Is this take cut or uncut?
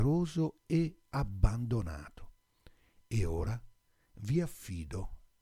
uncut